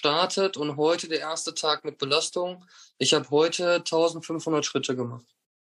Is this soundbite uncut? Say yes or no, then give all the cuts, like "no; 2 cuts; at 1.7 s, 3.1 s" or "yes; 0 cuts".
yes; 0 cuts